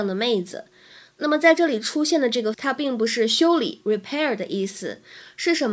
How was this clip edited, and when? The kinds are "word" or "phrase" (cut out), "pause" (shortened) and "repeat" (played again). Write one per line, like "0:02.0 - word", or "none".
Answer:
0:02.5 - word